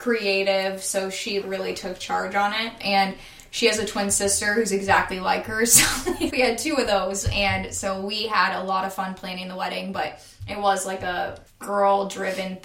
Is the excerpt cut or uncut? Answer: cut